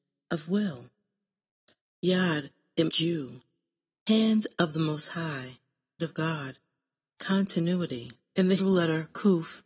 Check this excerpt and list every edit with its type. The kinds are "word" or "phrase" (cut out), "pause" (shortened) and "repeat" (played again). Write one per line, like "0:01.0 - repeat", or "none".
0:02.9 - word
0:06.0 - word
0:08.6 - word